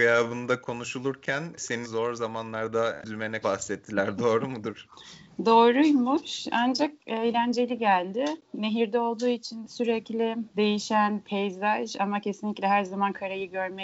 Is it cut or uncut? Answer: cut